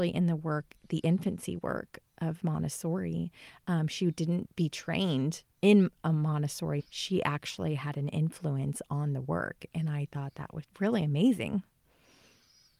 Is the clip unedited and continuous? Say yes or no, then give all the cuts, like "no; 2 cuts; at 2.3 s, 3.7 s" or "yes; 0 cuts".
no; 3 cuts; at 4.5 s, 6.8 s, 10.6 s